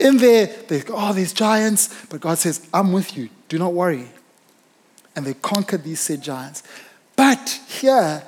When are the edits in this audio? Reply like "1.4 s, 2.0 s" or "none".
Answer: none